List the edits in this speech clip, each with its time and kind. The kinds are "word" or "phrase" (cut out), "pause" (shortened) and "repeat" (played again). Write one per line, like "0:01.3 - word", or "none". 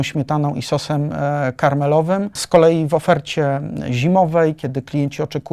none